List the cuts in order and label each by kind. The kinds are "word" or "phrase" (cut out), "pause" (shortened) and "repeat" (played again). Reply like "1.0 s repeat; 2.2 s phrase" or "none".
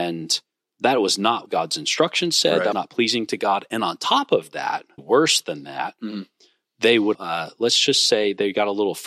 1.5 s word; 2.7 s word; 5.0 s word; 7.1 s word